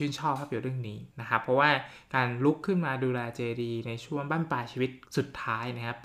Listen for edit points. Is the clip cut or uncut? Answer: cut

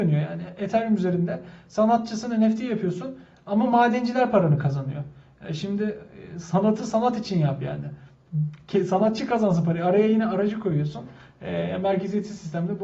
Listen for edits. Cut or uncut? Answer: uncut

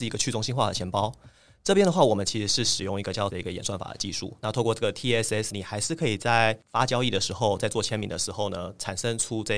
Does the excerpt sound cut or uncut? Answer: cut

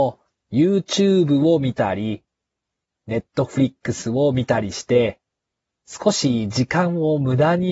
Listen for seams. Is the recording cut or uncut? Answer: uncut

